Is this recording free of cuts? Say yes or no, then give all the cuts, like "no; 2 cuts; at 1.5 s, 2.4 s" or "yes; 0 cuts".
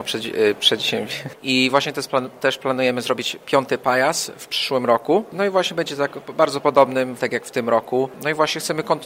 no; 1 cut; at 7.2 s